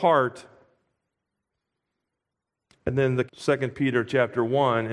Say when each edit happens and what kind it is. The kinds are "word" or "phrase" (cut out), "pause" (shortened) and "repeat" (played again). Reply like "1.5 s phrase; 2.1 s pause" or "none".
3.3 s word